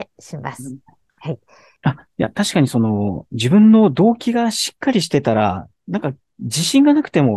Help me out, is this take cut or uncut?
uncut